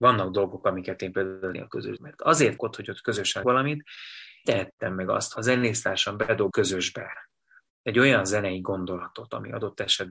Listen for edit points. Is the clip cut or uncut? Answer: cut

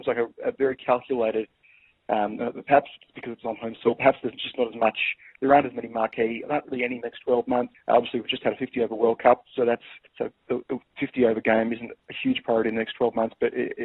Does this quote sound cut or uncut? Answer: cut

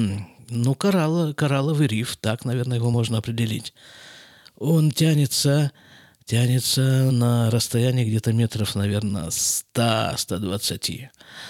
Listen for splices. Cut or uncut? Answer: uncut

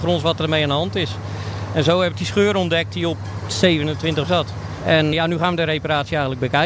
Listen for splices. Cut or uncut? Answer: cut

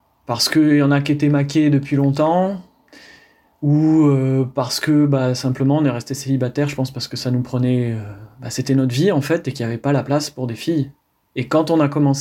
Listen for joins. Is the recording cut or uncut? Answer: uncut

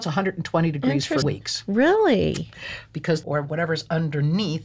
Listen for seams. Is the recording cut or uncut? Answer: cut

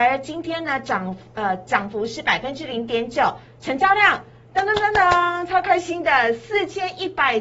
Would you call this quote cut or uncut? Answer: uncut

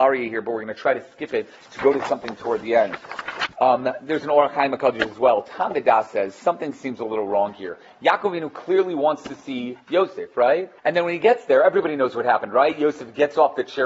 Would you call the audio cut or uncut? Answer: cut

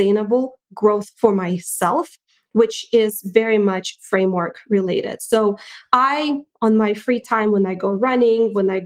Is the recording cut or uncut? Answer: uncut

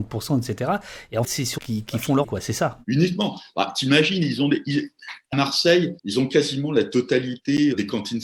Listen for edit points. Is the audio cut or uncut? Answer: cut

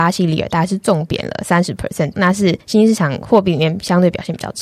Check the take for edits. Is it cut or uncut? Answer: cut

